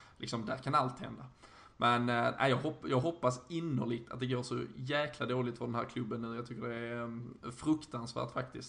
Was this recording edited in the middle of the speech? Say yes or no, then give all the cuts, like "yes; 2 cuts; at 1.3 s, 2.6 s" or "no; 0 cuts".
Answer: no; 0 cuts